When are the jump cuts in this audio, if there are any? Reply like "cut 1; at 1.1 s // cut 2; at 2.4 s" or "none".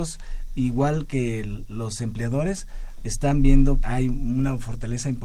cut 1; at 3.8 s